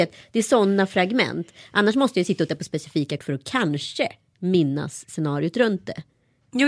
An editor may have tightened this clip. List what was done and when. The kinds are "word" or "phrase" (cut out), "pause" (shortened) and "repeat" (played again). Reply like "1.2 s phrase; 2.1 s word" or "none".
2.5 s word; 3.2 s word